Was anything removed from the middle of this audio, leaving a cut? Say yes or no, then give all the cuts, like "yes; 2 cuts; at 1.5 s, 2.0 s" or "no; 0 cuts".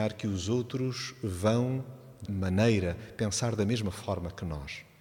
yes; 1 cut; at 2.3 s